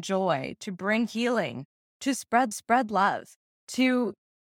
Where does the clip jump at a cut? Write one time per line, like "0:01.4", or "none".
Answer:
0:02.5